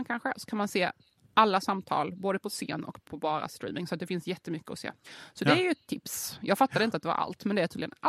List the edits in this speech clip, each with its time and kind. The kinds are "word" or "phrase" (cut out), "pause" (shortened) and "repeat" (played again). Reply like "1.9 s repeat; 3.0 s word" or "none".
none